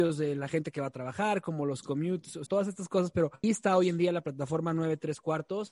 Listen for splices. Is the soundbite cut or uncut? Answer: cut